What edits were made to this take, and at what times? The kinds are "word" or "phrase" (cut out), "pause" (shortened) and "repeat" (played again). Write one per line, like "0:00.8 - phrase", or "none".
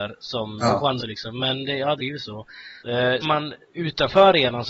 0:01.0 - word
0:02.0 - phrase
0:02.8 - pause
0:03.2 - word

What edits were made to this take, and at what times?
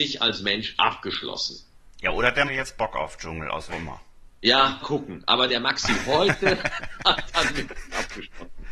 0:01.8 - pause
0:02.5 - phrase
0:03.7 - phrase
0:04.8 - word

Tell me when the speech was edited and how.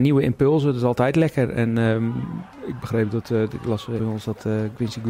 0:04.0 - phrase

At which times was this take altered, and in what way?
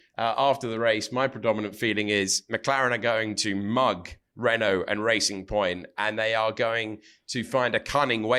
none

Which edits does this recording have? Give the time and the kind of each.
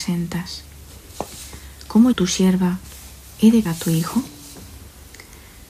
0:02.1 - word
0:03.6 - word

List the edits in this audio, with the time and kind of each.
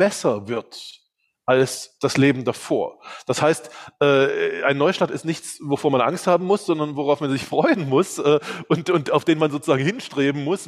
none

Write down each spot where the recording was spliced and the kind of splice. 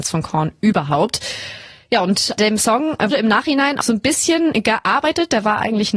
0:02.4 - word
0:03.1 - word
0:03.8 - word

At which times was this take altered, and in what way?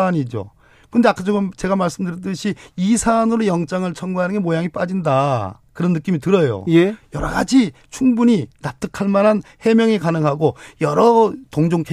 0:05.7 - pause

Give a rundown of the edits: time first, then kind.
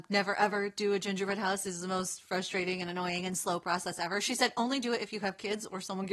none

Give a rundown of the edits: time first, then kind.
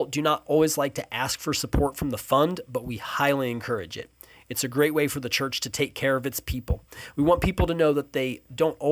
none

